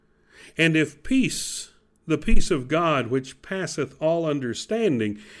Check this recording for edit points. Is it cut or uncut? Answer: uncut